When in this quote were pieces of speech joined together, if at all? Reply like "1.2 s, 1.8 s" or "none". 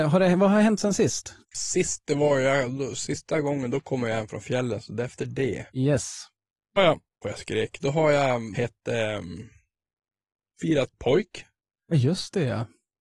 1.4 s, 5.7 s, 6.8 s, 7.2 s, 8.5 s, 10.9 s